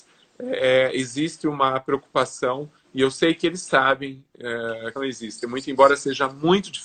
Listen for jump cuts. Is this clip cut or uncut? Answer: cut